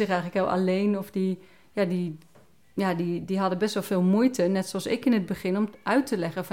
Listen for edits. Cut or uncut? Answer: uncut